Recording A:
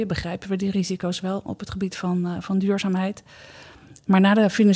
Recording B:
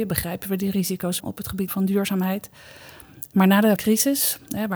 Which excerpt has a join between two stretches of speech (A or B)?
B